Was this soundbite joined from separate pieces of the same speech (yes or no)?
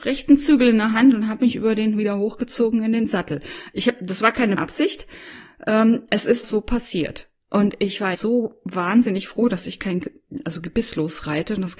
yes